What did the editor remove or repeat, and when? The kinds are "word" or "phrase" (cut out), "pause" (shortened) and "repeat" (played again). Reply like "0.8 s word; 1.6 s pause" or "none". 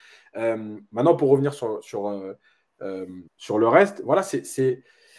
3.3 s pause